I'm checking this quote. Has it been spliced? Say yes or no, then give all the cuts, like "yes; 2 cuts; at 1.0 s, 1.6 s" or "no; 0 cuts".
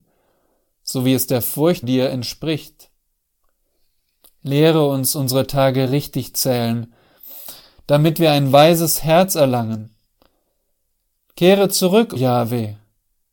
yes; 2 cuts; at 1.8 s, 12.2 s